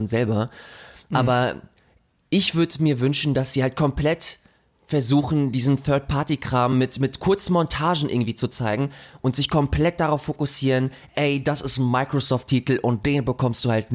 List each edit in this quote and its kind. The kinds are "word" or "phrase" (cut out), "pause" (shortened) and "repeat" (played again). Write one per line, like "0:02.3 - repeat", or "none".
none